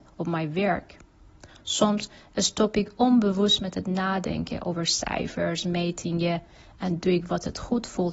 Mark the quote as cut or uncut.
uncut